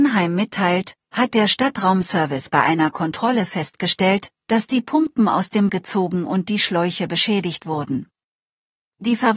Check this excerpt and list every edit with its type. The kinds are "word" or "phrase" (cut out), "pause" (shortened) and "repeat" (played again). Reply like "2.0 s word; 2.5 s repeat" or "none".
5.7 s word